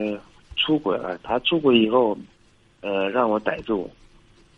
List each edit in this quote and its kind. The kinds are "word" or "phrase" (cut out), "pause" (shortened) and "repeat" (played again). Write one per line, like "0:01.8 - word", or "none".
0:02.5 - pause